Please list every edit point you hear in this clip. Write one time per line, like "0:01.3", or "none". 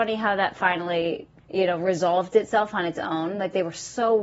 0:01.4